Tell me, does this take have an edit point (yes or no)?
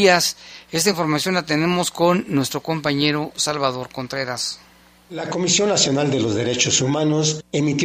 no